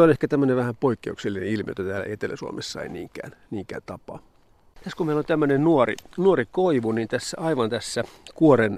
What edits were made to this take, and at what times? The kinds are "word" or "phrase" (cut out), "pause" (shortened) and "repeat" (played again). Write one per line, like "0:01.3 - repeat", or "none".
none